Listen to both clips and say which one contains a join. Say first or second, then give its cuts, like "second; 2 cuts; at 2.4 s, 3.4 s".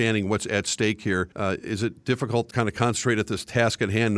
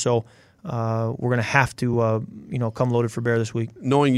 first; 2 cuts; at 1.3 s, 2.5 s